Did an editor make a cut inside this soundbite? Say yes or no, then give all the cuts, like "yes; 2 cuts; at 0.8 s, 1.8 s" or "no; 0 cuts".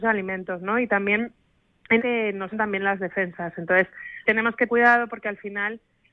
yes; 4 cuts; at 2.0 s, 2.5 s, 4.3 s, 4.7 s